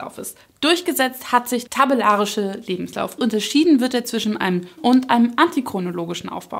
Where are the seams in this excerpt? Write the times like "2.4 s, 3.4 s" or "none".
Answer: 1.7 s, 3.2 s, 4.8 s